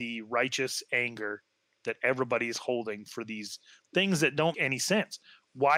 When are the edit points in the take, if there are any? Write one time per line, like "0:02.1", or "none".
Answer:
0:04.5

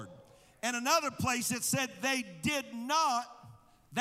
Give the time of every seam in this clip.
none

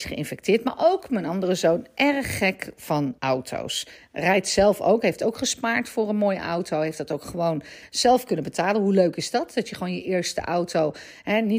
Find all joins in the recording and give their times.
0:03.2

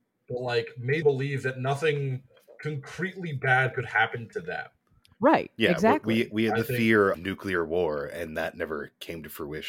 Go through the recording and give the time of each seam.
0:01.0
0:07.1

